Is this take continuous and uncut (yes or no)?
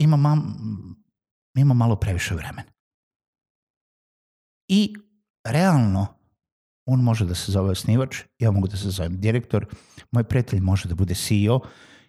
yes